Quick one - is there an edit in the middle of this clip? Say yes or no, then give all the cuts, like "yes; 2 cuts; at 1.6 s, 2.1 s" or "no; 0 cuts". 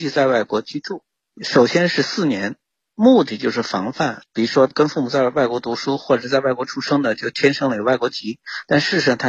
no; 0 cuts